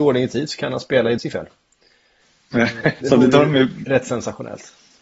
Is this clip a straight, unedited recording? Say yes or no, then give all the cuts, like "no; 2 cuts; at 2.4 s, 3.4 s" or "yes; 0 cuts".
no; 2 cuts; at 1.2 s, 3.0 s